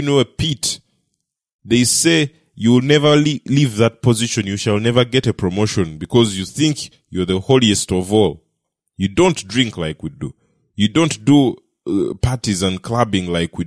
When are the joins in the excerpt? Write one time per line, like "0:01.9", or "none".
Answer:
none

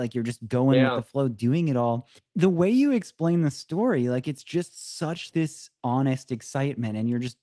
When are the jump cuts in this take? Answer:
0:05.3

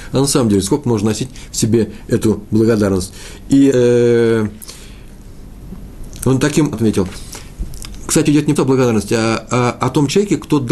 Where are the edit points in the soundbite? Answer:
0:03.7
0:06.7
0:08.3
0:08.6

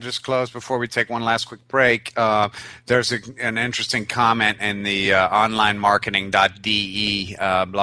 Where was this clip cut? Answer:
none

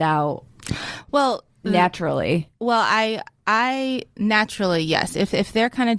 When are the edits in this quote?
none

